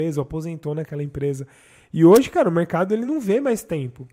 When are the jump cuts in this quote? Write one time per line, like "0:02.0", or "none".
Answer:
none